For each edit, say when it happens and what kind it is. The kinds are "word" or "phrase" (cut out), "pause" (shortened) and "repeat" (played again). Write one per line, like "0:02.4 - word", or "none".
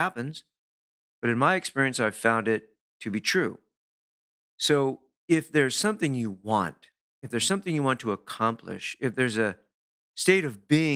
none